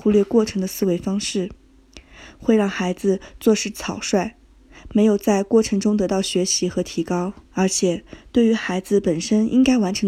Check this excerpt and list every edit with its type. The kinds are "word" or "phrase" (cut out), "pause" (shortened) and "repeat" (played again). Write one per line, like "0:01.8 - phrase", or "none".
0:07.5 - pause